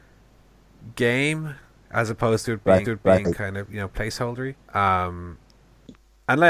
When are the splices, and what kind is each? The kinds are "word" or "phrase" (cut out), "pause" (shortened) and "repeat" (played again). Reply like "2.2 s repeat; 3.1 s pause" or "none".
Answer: 2.8 s repeat; 4.6 s pause